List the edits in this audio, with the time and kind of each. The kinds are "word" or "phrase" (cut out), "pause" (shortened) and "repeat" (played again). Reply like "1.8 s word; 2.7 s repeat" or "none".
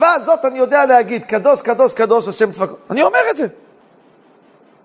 none